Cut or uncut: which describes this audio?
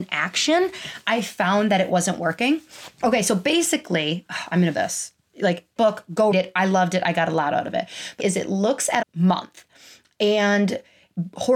cut